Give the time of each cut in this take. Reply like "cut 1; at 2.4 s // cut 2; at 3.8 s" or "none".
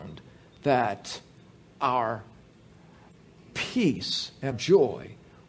cut 1; at 4.5 s